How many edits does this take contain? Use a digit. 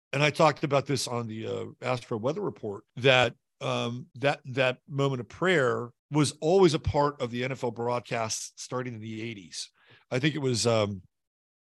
3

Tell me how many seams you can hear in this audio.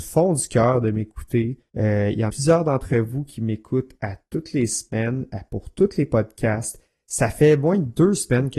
2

